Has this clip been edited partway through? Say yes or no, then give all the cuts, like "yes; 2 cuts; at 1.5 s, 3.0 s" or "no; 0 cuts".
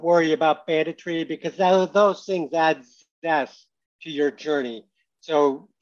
no; 0 cuts